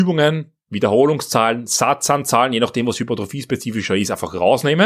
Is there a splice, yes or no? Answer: no